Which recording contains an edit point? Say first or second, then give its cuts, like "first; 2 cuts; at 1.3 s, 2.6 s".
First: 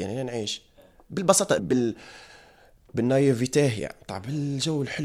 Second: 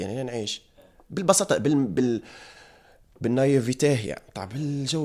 first; 1 cut; at 1.6 s